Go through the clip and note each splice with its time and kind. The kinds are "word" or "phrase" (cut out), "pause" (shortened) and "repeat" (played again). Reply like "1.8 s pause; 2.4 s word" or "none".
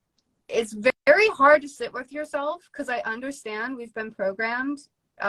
1.0 s pause